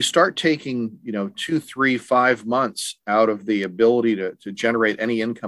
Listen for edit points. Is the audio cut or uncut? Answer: uncut